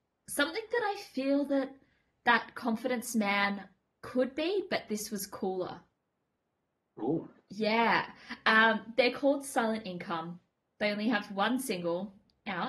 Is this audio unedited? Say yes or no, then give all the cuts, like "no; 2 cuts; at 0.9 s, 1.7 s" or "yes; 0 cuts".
yes; 0 cuts